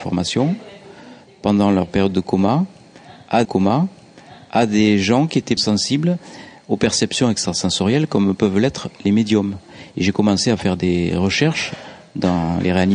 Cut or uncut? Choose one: cut